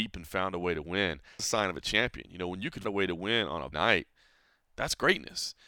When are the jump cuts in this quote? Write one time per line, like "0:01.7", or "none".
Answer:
0:01.4
0:02.8
0:03.7

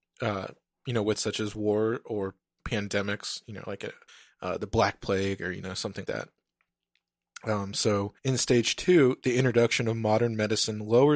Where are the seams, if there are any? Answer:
0:01.1
0:04.1
0:06.0
0:08.2

